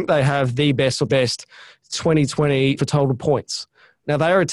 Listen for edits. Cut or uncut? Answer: cut